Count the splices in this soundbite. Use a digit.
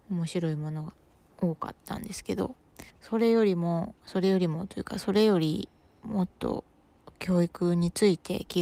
1